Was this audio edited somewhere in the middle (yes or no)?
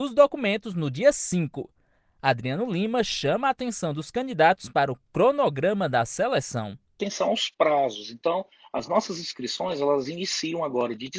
no